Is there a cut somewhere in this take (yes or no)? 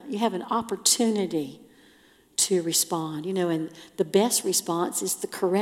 no